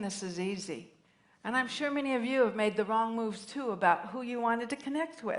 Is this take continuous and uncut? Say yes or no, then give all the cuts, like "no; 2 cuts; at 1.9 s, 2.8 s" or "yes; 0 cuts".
no; 1 cut; at 1.0 s